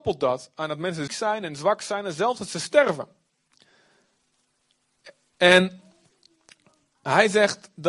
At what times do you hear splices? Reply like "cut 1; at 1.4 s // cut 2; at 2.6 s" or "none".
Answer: cut 1; at 1.1 s